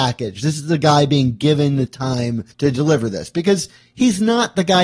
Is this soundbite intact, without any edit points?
no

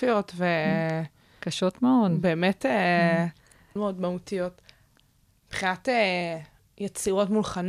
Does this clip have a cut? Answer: yes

